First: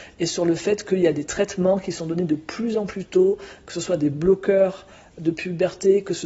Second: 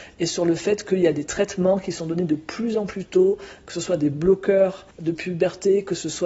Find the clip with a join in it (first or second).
second